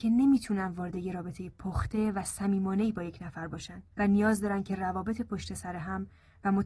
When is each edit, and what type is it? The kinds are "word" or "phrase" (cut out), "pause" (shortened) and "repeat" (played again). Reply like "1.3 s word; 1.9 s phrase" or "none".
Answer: 3.9 s pause